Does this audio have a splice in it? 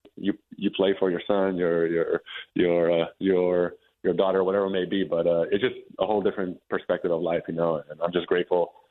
yes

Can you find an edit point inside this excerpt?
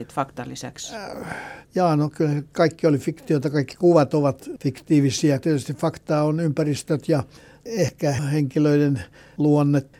yes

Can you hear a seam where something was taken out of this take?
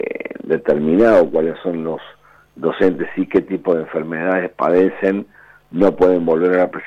no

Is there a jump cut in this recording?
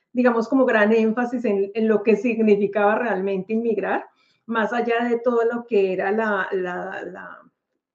no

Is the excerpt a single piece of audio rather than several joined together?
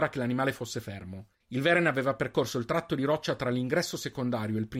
no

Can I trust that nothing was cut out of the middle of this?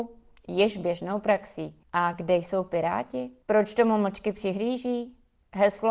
yes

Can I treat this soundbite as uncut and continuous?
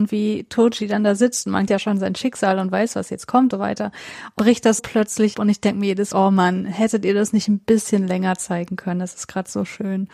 no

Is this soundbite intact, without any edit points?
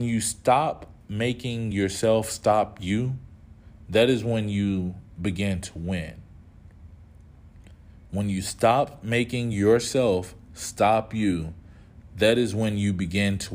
yes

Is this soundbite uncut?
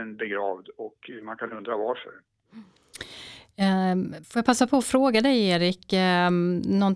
no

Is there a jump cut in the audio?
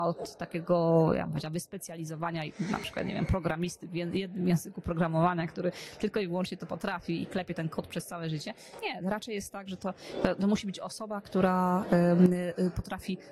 no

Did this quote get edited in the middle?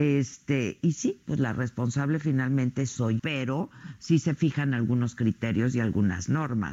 yes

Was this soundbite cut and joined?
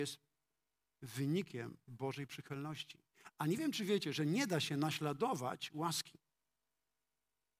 no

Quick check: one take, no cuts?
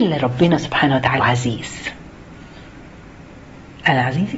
no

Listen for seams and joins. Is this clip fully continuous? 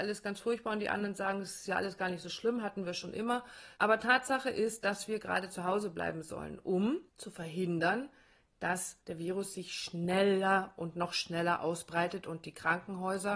no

